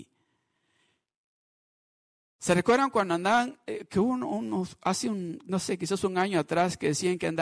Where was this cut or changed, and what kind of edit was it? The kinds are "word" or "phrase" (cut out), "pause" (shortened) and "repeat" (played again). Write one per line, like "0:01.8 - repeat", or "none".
none